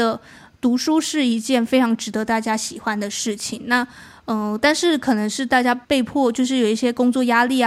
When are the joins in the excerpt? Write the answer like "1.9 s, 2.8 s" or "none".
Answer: 5.8 s